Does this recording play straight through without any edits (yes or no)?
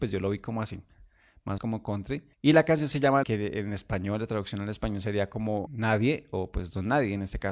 no